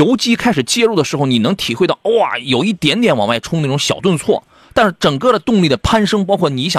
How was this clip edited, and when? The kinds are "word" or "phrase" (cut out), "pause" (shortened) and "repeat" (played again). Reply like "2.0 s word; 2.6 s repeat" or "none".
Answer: none